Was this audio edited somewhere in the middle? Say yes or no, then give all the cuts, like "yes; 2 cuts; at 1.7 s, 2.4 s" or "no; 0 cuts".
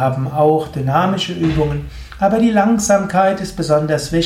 no; 0 cuts